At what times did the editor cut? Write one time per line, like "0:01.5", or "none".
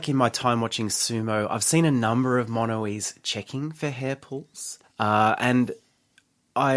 0:04.8